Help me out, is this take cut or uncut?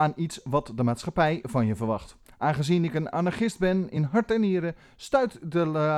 uncut